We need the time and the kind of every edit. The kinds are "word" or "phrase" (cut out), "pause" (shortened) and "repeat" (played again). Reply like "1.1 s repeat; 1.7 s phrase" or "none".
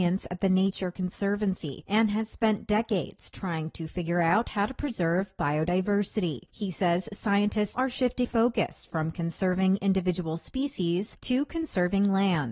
7.7 s word; 8.2 s word